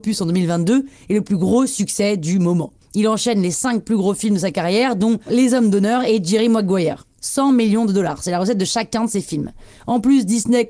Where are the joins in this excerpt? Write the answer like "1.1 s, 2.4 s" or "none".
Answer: 2.8 s

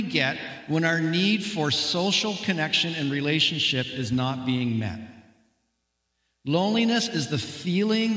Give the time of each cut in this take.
none

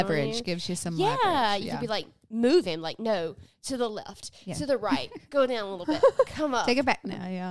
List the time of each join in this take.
none

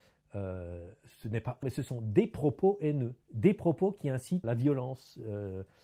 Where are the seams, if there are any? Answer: 1.6 s, 3.2 s, 4.4 s

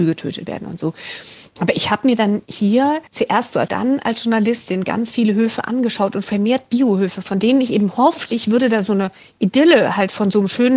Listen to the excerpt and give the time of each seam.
3.1 s, 3.7 s

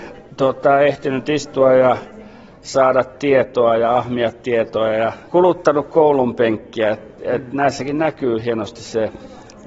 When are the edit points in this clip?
none

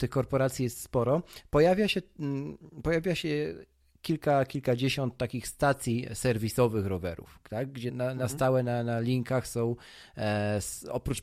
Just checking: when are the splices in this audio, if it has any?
7.9 s

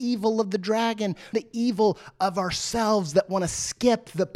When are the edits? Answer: 1.3 s

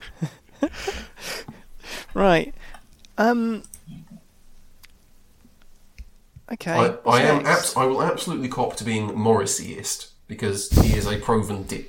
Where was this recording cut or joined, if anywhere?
none

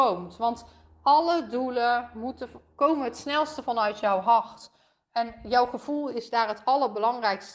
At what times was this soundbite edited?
none

